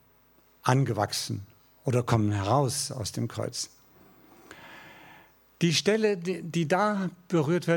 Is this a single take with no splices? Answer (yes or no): yes